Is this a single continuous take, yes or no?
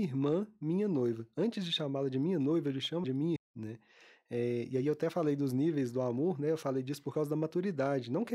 no